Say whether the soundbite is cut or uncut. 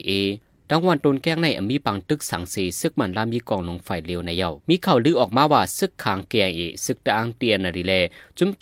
cut